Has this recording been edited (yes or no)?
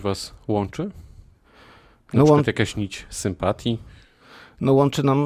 no